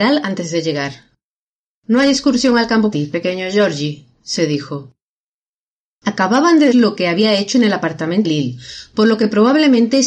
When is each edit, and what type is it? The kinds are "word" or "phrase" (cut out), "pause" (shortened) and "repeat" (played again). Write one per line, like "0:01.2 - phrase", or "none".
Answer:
0:02.9 - word
0:06.7 - word
0:08.2 - word